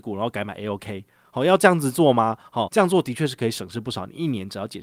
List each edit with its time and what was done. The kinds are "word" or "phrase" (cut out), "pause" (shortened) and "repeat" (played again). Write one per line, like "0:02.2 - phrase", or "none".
0:02.7 - word